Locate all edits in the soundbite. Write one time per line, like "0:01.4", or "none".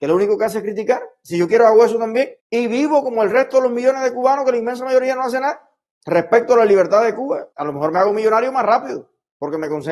0:02.4
0:05.9
0:07.5